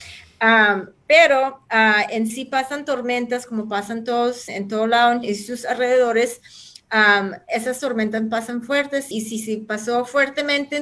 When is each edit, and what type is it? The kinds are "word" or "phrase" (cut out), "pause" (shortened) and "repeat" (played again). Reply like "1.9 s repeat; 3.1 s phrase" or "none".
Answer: 2.3 s word; 4.5 s word; 5.2 s word; 9.1 s word

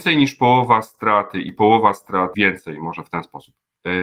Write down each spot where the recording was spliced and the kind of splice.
2.3 s word

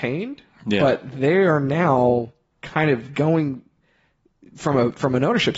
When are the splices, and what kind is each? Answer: none

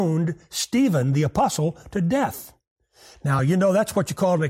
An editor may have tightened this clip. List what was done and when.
none

